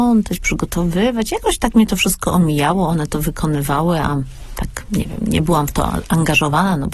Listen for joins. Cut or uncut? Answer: uncut